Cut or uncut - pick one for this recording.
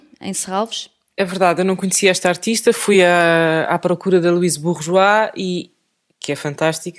uncut